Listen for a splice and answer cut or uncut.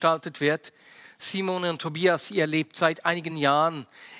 uncut